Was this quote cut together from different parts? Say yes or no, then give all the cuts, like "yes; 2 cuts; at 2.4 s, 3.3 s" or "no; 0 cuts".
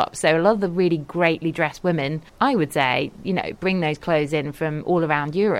yes; 1 cut; at 2.3 s